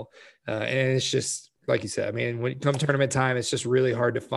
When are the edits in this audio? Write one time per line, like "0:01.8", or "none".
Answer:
0:01.6